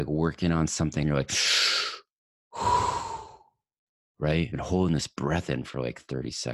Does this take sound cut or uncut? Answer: cut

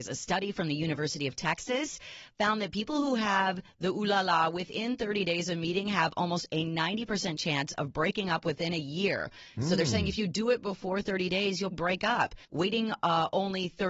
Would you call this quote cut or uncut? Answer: cut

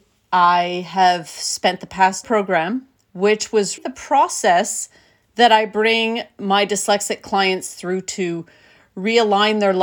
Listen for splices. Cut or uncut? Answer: cut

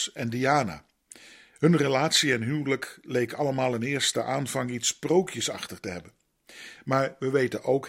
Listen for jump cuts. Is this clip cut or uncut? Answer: uncut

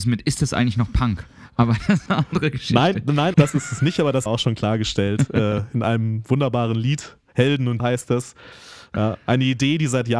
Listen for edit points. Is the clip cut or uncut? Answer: cut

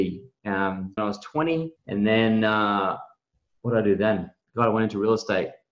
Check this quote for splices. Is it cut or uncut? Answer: cut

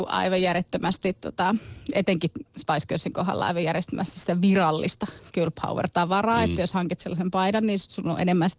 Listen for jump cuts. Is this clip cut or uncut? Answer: uncut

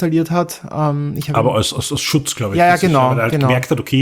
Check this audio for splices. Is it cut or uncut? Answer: uncut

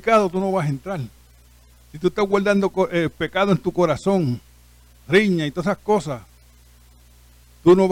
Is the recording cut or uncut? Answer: uncut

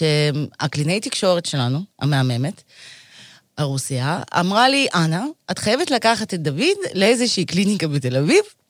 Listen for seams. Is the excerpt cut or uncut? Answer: uncut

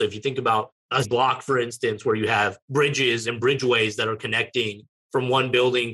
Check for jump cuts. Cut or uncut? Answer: cut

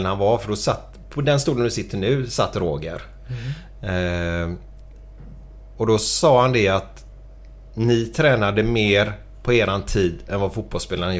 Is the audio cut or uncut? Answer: uncut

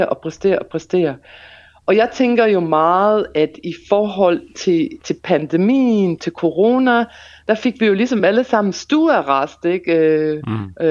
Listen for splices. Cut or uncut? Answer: uncut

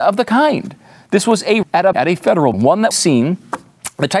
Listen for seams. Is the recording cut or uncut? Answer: cut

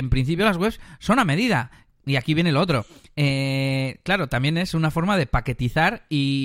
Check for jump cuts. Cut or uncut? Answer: uncut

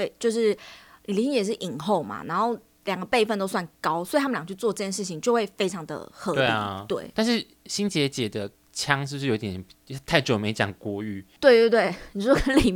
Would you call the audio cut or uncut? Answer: uncut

